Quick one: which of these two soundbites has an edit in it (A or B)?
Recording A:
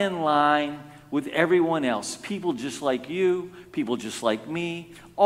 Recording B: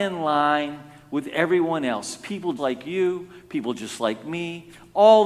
B